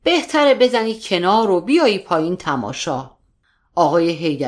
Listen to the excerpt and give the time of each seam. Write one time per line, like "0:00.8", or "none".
none